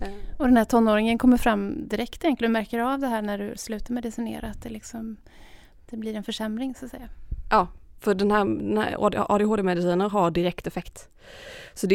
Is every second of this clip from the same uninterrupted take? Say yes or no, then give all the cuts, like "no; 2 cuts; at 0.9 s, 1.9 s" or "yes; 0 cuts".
yes; 0 cuts